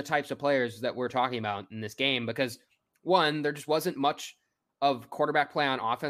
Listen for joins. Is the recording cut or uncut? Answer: uncut